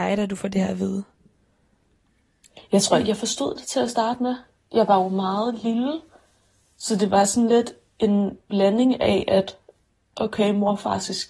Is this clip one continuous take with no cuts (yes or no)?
yes